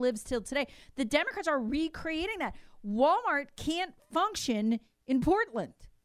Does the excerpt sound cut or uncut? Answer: uncut